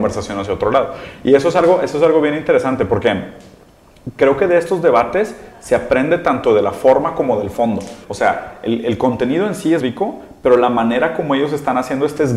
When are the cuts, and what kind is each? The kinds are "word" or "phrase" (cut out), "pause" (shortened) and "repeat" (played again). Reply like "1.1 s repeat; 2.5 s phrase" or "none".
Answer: 8.0 s pause; 9.8 s word